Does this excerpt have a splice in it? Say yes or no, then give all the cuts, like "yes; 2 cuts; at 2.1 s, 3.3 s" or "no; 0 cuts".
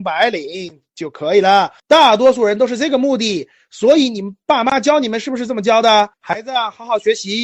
yes; 2 cuts; at 1.8 s, 6.1 s